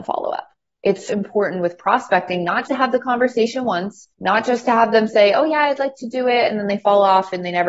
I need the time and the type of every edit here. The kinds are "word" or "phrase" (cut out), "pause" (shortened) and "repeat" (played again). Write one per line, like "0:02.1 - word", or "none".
0:01.1 - word
0:02.7 - word
0:04.1 - pause

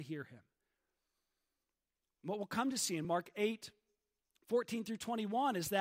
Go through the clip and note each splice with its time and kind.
none

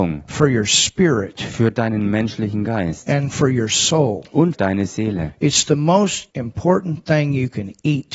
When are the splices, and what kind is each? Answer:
0:04.5 - word
0:06.3 - pause

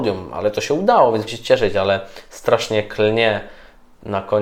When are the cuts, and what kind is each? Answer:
0:01.3 - word

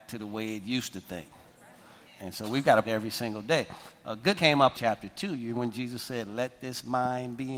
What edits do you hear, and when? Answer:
0:02.1 - pause
0:02.8 - word
0:04.3 - word
0:04.7 - phrase
0:05.5 - word

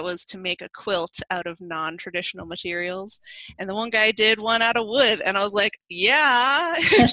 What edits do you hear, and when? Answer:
none

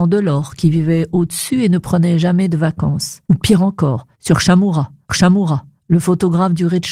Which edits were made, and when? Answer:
0:03.2 - pause
0:04.1 - pause
0:05.1 - repeat

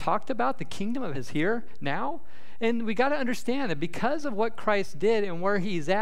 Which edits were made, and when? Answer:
0:01.1 - word

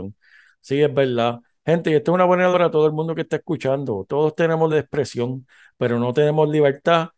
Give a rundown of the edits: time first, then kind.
0:02.5 - word
0:04.7 - word

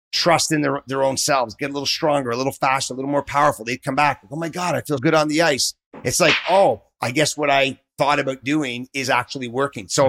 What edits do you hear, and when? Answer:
0:05.0 - word

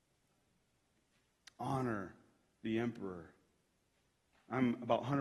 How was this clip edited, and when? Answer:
none

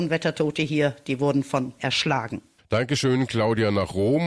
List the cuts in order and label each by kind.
0:01.8 - word

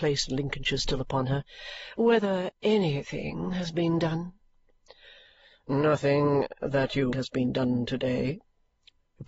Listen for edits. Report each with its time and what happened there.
0:07.1 - phrase

